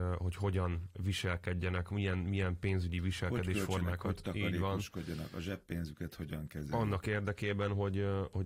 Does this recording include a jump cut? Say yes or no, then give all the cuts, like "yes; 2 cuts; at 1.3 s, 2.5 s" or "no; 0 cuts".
no; 0 cuts